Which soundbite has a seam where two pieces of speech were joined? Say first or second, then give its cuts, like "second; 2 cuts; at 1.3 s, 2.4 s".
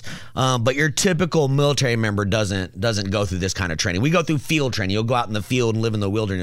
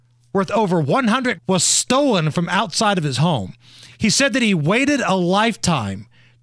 second; 1 cut; at 1.3 s